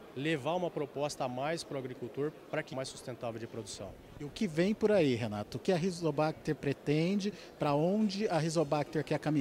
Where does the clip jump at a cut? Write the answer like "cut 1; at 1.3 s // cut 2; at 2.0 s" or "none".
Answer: cut 1; at 2.7 s // cut 2; at 4.3 s // cut 3; at 5.6 s